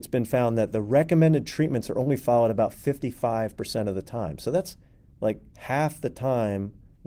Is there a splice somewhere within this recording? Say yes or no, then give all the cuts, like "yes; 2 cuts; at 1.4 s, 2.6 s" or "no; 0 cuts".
yes; 1 cut; at 5.5 s